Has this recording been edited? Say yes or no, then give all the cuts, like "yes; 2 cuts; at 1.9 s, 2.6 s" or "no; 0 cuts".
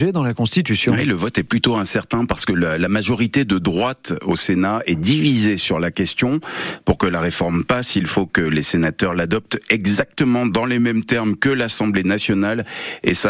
no; 0 cuts